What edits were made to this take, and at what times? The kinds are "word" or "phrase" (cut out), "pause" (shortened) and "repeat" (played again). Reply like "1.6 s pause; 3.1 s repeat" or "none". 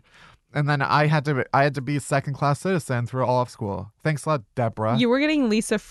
3.5 s word

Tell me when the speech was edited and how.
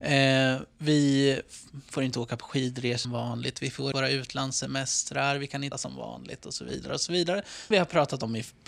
3.0 s word; 3.9 s word; 5.7 s word; 7.7 s word

